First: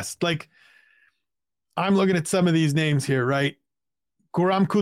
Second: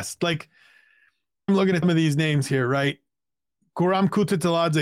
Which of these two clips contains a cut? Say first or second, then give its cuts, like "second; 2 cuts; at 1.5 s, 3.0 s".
second; 2 cuts; at 1.5 s, 1.8 s